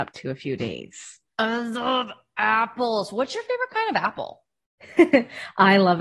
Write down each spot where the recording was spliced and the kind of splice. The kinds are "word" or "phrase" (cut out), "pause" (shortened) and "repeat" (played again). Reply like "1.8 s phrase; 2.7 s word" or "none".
1.3 s pause